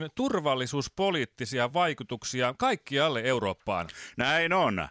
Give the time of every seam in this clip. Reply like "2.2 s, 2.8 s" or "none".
none